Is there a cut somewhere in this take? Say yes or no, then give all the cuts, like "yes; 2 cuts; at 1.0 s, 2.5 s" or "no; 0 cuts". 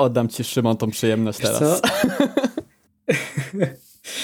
no; 0 cuts